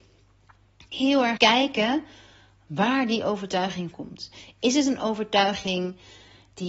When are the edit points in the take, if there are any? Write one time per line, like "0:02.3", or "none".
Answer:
0:00.9
0:01.4
0:03.9